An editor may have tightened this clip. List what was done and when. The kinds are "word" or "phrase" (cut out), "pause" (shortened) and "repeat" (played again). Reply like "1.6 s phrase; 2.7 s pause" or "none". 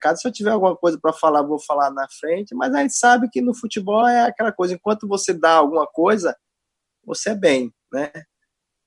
none